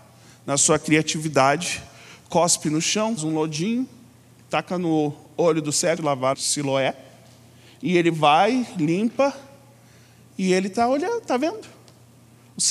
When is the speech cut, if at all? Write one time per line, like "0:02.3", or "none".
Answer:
0:03.2
0:06.0
0:06.3